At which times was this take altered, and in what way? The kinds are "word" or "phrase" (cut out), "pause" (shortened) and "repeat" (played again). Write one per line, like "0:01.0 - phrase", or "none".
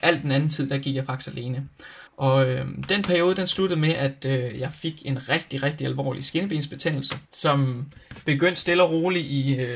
0:02.1 - pause
0:07.3 - pause